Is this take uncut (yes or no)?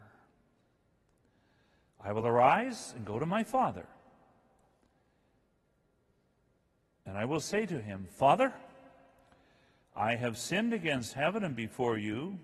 yes